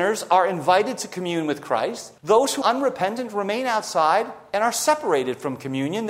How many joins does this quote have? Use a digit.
2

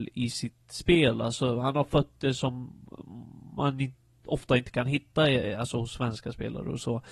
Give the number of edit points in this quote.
0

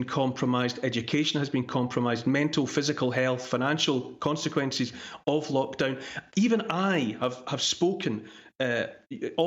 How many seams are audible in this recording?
0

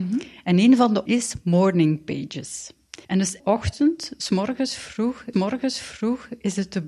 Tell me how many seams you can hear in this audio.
4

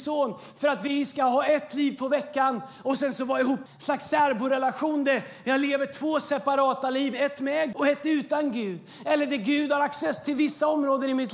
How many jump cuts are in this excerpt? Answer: 2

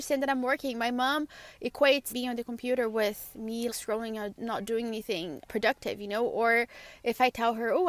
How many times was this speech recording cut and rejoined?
3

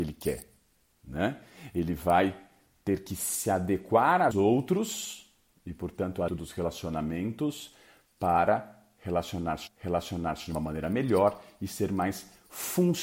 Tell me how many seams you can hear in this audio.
3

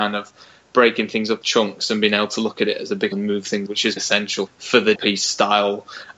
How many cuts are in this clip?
6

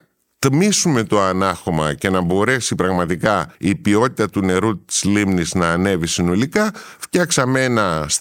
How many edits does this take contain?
1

